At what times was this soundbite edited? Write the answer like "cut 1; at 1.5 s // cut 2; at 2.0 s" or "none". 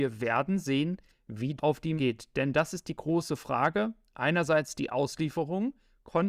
cut 1; at 1.6 s // cut 2; at 2.0 s